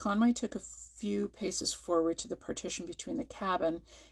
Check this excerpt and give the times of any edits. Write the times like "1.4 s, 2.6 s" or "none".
none